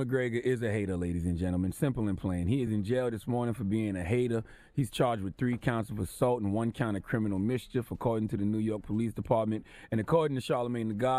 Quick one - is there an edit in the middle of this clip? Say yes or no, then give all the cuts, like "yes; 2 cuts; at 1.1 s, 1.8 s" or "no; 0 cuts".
no; 0 cuts